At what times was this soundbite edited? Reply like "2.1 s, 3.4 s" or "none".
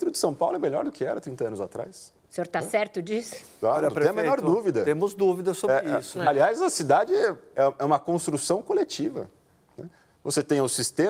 2.2 s